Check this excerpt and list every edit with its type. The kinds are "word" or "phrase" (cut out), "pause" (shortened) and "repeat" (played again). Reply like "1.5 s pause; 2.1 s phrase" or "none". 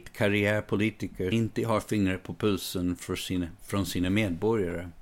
1.3 s word; 3.6 s pause